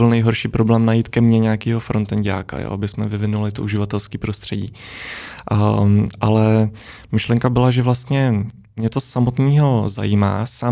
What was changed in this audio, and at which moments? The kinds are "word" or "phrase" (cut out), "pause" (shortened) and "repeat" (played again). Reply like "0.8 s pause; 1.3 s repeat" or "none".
none